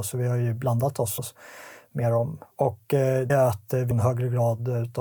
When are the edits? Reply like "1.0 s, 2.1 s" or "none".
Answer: 1.2 s, 2.5 s, 3.3 s, 3.9 s